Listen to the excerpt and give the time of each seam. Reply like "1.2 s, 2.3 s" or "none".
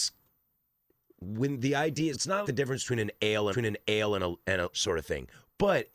2.1 s, 2.4 s, 3.5 s, 4.7 s